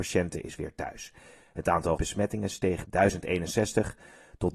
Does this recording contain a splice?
yes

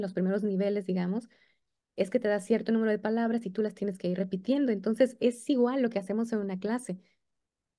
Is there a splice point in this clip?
no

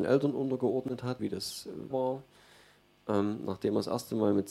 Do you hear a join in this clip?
yes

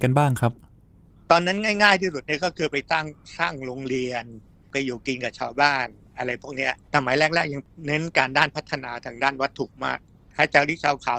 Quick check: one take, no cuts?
no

